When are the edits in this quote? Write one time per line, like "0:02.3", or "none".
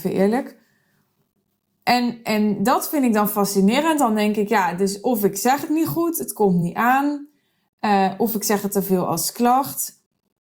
none